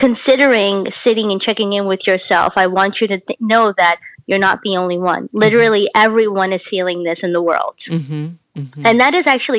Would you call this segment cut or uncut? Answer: uncut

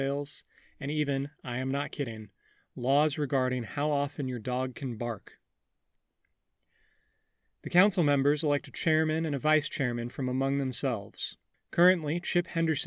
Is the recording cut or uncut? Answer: cut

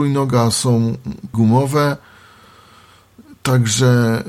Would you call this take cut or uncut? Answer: cut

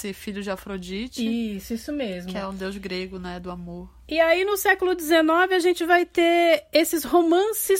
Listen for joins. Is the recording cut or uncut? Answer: uncut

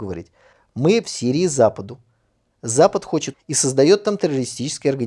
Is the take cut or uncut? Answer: cut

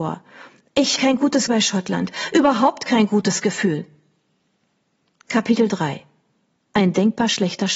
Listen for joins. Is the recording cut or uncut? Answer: cut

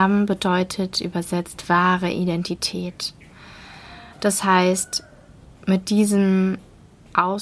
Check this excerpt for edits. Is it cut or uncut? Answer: uncut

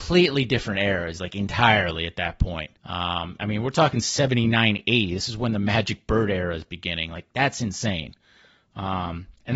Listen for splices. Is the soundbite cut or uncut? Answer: cut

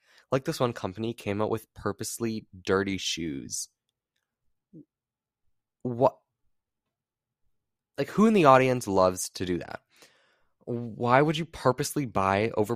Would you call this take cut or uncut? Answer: uncut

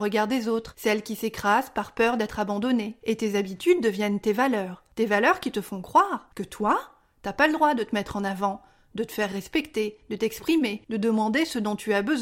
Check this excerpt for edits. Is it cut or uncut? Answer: uncut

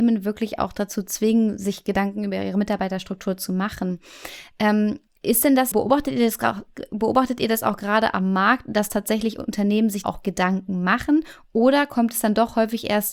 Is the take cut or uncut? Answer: cut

